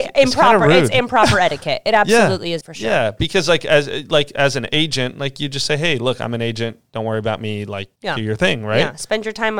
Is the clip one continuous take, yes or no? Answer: no